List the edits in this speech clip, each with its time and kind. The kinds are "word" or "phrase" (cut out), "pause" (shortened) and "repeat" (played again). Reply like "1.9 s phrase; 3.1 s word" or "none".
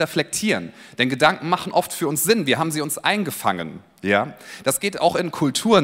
none